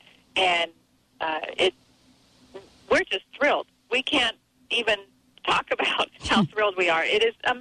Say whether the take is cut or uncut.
uncut